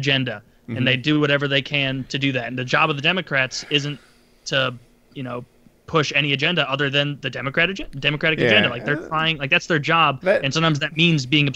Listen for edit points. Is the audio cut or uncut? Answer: uncut